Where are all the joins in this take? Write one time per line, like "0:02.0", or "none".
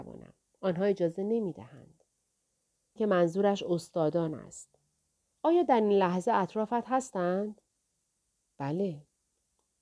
0:03.0

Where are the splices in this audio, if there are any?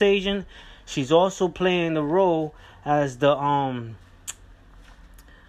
none

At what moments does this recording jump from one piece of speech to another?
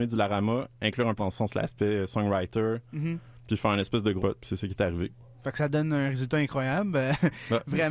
0:01.2
0:04.2

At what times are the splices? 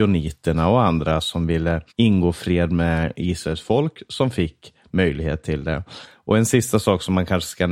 0:01.9

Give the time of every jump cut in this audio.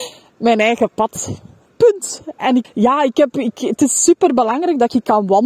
0:02.6

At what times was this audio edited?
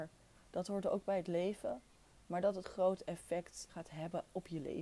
0:02.6
0:03.7

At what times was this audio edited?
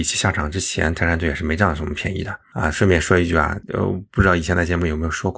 0:03.6

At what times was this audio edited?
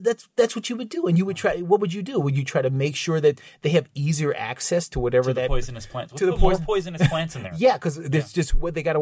none

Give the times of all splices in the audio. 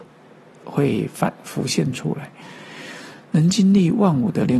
none

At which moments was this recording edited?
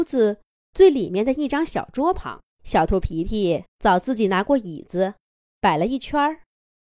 0:02.5
0:03.7

